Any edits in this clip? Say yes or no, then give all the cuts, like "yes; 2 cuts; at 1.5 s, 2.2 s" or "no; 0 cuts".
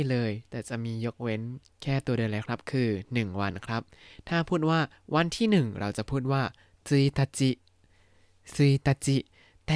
no; 0 cuts